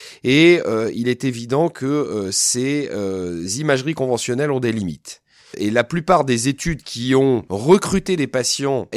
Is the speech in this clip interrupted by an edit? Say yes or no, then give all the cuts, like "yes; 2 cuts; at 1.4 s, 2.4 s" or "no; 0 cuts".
no; 0 cuts